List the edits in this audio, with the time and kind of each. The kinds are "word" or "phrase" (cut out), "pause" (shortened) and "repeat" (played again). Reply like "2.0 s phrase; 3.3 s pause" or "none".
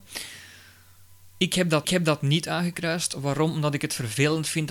1.8 s repeat